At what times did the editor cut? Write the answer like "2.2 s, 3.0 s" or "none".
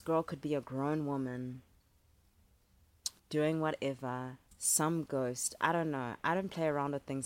3.2 s, 4.5 s